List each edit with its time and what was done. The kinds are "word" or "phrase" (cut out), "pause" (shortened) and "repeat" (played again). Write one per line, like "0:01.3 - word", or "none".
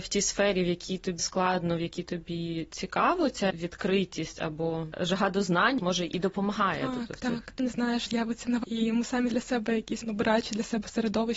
0:01.2 - word
0:03.5 - word
0:05.8 - word
0:07.6 - word
0:08.1 - word
0:08.6 - word
0:09.3 - word
0:10.0 - word